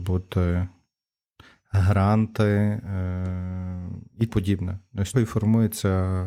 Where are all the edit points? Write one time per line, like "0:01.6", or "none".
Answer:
0:04.3
0:05.1